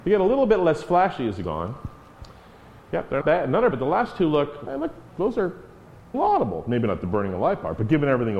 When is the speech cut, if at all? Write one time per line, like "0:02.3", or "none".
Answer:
0:01.4
0:03.2
0:03.7
0:04.7
0:05.1
0:06.1